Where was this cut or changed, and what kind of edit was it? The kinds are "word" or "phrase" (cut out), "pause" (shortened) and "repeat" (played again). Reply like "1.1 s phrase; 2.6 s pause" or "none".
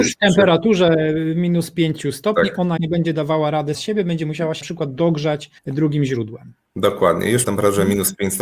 2.8 s word; 3.7 s word; 4.6 s word; 5.6 s pause; 7.4 s word

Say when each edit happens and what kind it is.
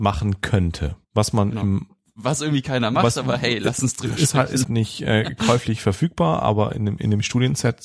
1.0 s pause; 4.6 s phrase

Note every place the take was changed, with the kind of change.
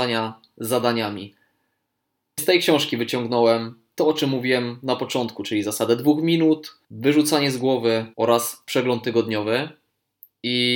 2.4 s word; 6.8 s pause; 8.1 s pause

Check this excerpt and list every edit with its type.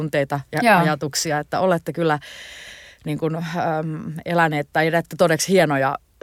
none

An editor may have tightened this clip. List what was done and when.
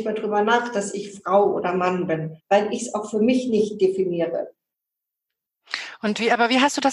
2.4 s pause

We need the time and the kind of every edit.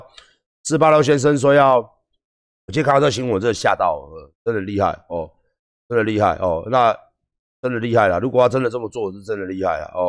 none

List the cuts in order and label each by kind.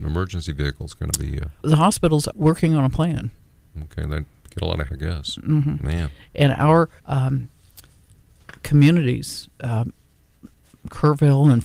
1.6 s word; 2.3 s word; 4.9 s word; 7.0 s pause

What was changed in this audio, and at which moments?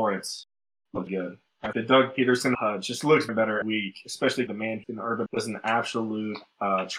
1.1 s word; 1.7 s word; 2.5 s word; 3.3 s word; 3.6 s word; 4.5 s word; 4.8 s word; 5.3 s word

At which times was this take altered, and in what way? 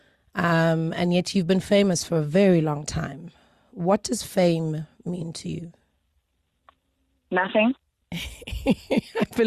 none

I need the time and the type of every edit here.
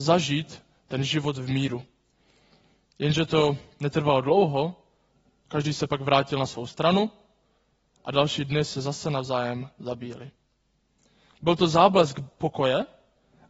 none

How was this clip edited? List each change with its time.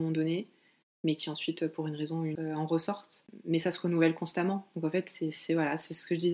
2.3 s word

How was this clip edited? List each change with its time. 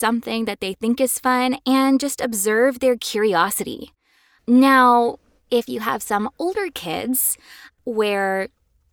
none

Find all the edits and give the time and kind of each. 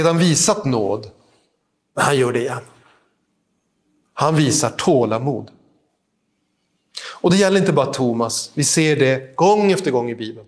none

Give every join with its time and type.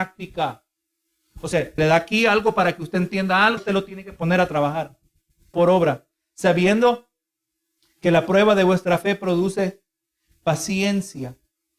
1.8 s word; 3.6 s word; 5.5 s word

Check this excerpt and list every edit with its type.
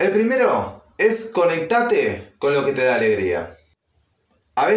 0.9 s pause

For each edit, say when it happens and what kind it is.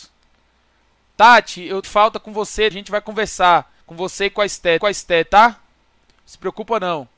1.8 s phrase; 2.7 s phrase; 3.8 s pause; 4.8 s repeat

